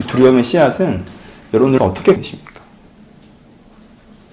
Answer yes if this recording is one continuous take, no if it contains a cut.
no